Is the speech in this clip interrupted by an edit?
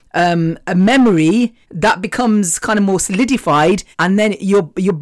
yes; 2 cuts; at 1.6 s, 3.9 s

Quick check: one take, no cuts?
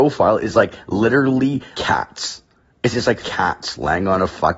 no; 2 cuts; at 1.7 s, 3.2 s

